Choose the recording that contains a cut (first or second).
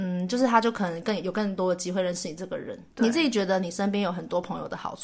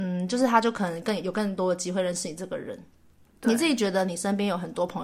first